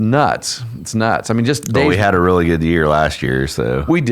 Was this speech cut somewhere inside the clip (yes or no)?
no